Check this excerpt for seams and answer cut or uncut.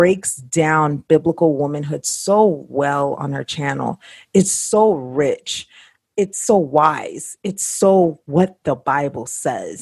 uncut